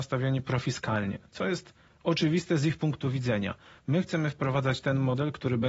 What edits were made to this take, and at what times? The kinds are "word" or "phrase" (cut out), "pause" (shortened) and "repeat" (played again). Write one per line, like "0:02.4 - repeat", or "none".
none

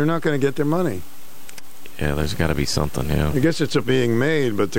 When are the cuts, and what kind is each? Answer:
0:03.8 - word

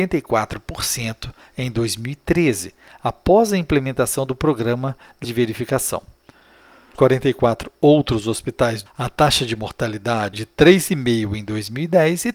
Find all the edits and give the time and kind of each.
0:05.2 - word
0:06.9 - word
0:08.9 - word
0:10.3 - word

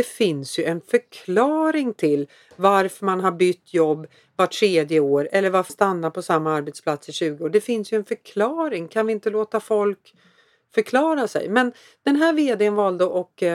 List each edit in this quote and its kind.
0:05.7 - word

